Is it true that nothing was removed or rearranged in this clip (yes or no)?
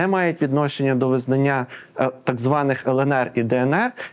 yes